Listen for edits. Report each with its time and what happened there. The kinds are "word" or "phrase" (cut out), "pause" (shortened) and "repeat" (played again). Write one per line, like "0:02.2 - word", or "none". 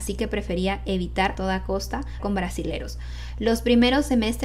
0:01.3 - word
0:02.2 - word

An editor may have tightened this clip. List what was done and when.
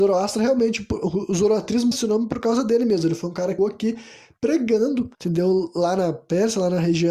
0:01.9 - word
0:03.6 - word
0:05.1 - pause

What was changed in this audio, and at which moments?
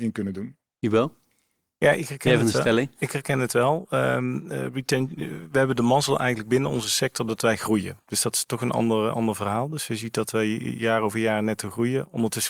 none

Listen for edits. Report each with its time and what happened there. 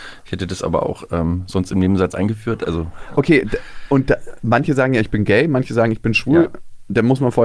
none

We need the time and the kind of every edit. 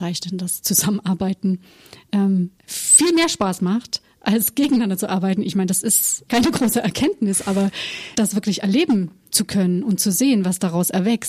0:02.6 - pause
0:06.3 - word
0:08.1 - word

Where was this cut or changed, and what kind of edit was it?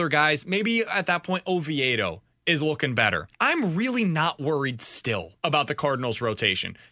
0:03.3 - pause
0:05.4 - pause

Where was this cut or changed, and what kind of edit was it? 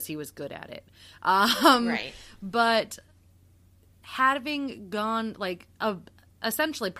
none

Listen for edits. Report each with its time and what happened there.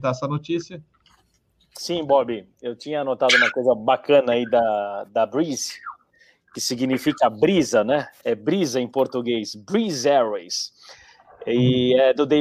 none

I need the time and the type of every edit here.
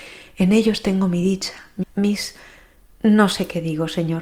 0:01.8 - word

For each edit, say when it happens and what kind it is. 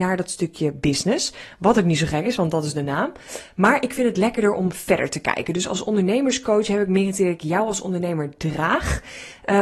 none

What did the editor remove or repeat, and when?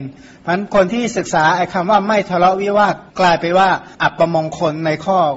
0:03.1 - pause
0:03.9 - pause

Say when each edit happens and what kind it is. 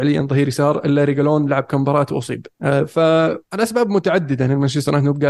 0:02.5 - pause
0:03.4 - pause

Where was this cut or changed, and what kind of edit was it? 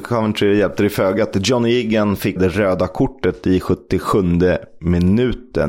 0:02.4 - word

